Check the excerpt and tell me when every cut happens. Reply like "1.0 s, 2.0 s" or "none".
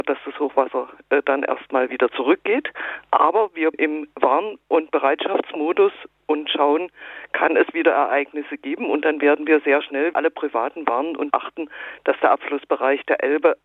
3.7 s, 10.1 s, 11.3 s